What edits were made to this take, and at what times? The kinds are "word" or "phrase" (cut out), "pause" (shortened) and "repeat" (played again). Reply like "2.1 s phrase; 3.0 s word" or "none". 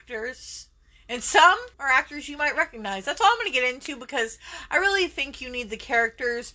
1.7 s pause